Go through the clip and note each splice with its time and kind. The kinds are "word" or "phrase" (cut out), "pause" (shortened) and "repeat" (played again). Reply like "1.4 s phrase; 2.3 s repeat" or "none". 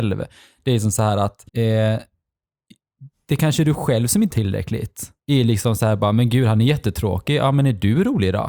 1.5 s pause; 4.3 s word; 5.2 s pause